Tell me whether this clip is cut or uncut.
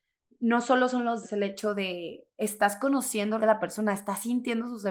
cut